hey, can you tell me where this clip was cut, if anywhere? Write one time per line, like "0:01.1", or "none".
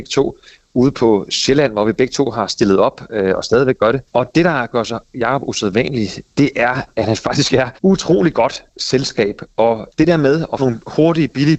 0:04.1
0:07.8
0:10.6